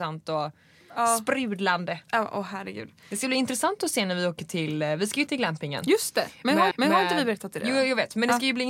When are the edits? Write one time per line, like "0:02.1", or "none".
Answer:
0:02.0
0:05.3
0:06.7